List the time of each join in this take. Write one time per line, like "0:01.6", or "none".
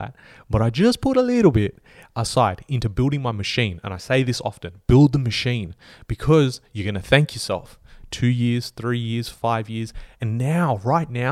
none